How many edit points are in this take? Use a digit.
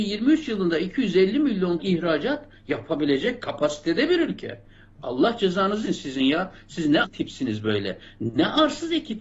3